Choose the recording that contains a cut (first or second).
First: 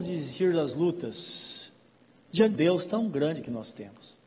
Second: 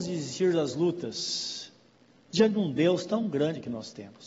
first